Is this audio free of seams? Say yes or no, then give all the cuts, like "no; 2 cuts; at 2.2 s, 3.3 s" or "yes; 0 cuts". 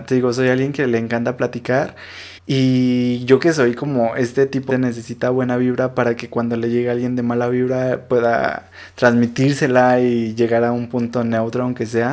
no; 3 cuts; at 2.4 s, 3.4 s, 4.7 s